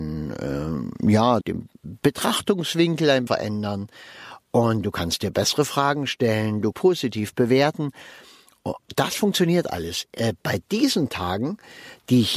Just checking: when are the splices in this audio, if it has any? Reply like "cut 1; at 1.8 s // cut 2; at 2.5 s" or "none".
cut 1; at 1.4 s // cut 2; at 3.3 s // cut 3; at 6.7 s

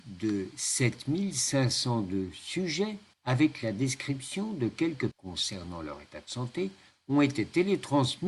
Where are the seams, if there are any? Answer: cut 1; at 3.1 s // cut 2; at 5.1 s

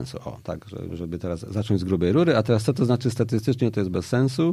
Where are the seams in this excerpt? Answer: none

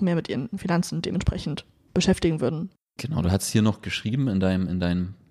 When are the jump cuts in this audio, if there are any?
cut 1; at 2.8 s

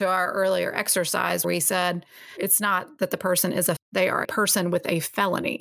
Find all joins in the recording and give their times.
cut 1; at 1.4 s // cut 2; at 3.8 s // cut 3; at 4.2 s

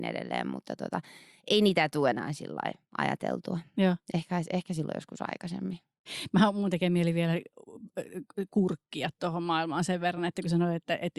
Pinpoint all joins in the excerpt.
none

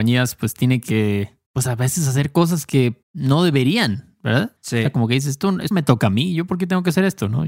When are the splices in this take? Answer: cut 1; at 1.5 s // cut 2; at 3.0 s // cut 3; at 4.6 s // cut 4; at 5.7 s

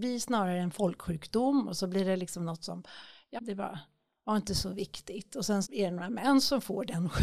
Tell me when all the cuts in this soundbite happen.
cut 1; at 3.4 s // cut 2; at 5.6 s

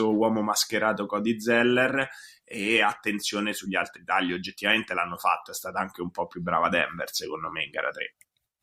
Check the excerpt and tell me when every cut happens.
none

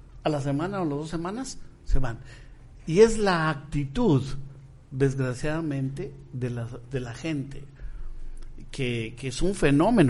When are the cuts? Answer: cut 1; at 4.8 s

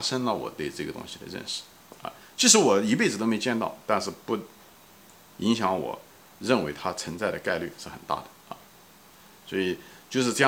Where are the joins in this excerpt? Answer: none

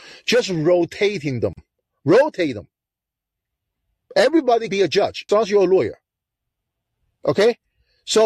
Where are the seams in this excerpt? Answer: cut 1; at 4.7 s // cut 2; at 5.3 s

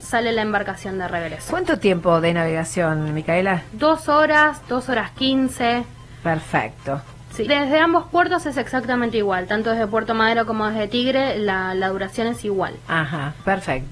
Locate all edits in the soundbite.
cut 1; at 7.5 s

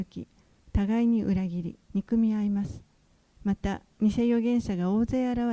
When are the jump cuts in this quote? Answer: cut 1; at 1.8 s

